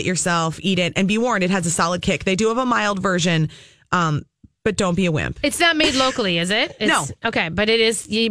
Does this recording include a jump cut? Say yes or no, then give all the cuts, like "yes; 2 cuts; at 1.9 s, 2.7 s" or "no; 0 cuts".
no; 0 cuts